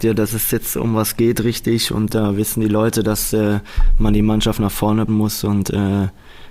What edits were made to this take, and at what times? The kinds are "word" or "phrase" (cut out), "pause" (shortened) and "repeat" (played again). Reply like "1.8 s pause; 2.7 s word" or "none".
5.1 s word